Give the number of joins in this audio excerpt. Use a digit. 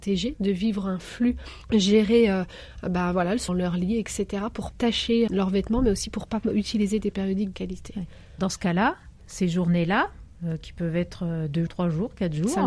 7